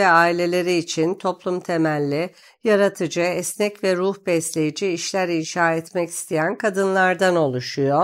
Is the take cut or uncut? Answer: uncut